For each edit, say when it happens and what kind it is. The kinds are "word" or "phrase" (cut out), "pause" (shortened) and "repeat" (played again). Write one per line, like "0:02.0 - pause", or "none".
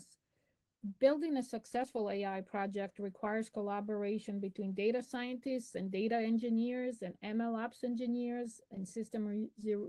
none

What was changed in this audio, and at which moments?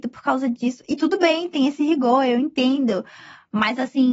none

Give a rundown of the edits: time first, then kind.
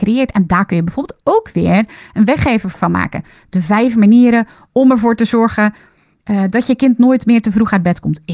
none

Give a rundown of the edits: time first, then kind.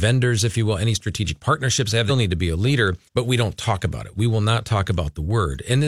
0:02.1 - word
0:03.1 - pause

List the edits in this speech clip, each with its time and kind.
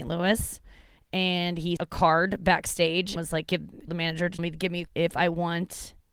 0:01.8 - word
0:03.2 - word
0:03.9 - word
0:04.4 - word
0:04.9 - word

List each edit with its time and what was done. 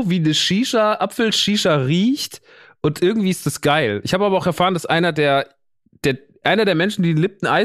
none

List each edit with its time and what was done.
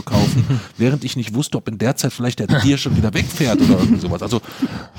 0:02.5 - word

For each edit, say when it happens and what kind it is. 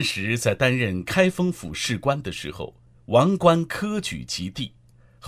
none

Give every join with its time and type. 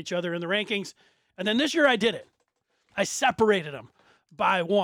none

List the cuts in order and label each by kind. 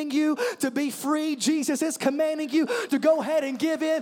0:02.9 - word

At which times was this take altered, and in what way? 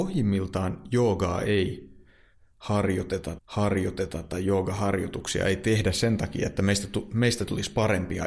0:03.4 - repeat

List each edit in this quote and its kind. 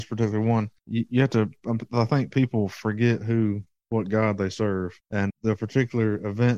0:05.3 - word

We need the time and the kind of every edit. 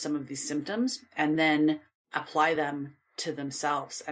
none

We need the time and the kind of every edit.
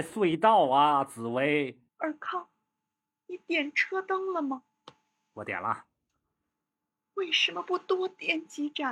0:01.9 - pause

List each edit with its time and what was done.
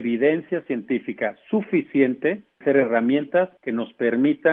0:02.6 - phrase
0:03.6 - pause

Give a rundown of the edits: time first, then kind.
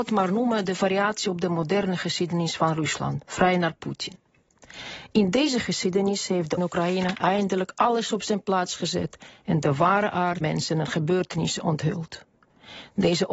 0:06.6 - phrase
0:10.4 - word

